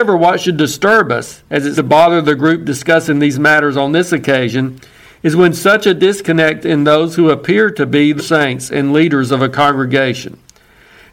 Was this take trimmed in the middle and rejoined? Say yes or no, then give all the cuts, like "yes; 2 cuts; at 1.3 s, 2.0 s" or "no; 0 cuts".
yes; 3 cuts; at 1.8 s, 6.6 s, 8.2 s